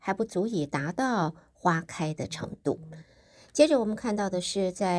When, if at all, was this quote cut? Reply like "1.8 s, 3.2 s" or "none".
none